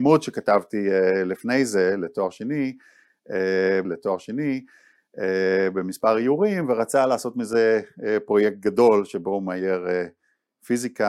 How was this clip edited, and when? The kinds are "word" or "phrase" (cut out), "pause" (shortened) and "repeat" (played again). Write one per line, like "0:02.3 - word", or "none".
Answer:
0:03.8 - repeat